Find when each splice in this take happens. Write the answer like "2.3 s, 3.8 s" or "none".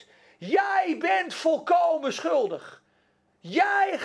none